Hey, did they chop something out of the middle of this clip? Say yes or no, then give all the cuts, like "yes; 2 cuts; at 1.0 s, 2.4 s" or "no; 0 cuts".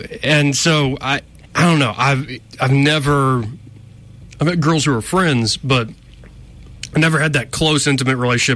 yes; 1 cut; at 1.4 s